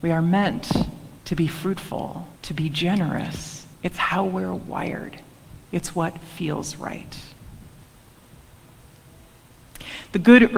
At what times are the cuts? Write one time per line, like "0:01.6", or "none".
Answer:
0:01.2
0:02.4
0:03.7